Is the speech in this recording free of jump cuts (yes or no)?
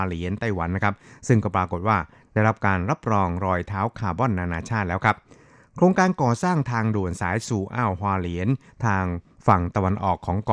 yes